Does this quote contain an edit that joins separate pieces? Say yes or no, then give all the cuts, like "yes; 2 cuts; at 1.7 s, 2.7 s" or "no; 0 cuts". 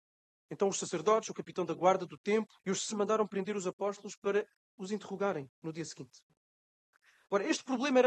yes; 2 cuts; at 2.6 s, 2.9 s